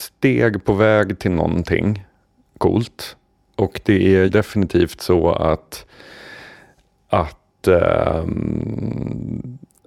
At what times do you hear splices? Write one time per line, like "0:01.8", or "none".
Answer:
0:04.3